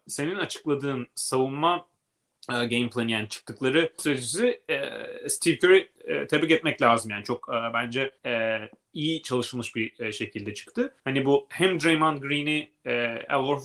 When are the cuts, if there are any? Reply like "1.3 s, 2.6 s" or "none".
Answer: 4.0 s, 8.2 s, 11.0 s